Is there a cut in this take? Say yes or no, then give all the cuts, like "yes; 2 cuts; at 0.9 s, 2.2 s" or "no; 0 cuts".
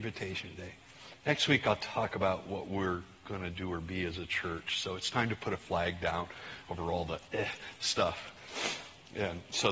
no; 0 cuts